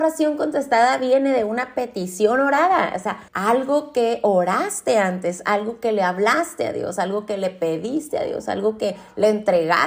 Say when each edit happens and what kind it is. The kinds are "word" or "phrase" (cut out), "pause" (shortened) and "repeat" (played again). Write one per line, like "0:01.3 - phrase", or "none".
0:03.3 - pause